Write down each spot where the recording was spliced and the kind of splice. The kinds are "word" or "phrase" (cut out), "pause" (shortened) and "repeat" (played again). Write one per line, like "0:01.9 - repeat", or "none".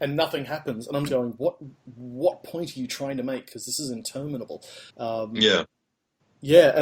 0:01.1 - phrase
0:04.9 - pause